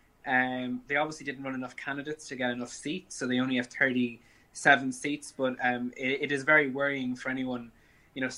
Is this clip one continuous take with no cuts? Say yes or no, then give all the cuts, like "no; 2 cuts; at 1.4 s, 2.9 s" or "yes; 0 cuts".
yes; 0 cuts